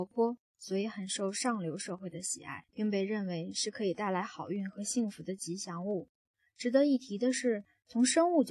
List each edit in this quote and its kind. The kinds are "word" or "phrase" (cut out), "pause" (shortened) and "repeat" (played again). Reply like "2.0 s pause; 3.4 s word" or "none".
2.7 s pause